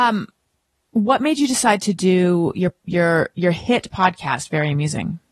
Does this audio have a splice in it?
no; 0 cuts

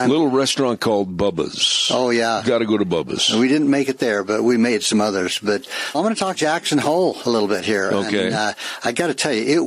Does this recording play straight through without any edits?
no; 2 cuts; at 5.9 s, 6.3 s

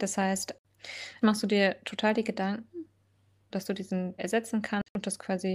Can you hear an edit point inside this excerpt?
yes; 3 cuts; at 1.2 s, 3.5 s, 4.2 s

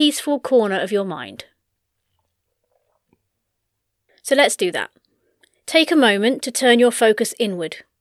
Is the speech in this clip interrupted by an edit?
no; 0 cuts

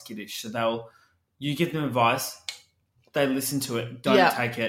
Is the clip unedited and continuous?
yes; 0 cuts

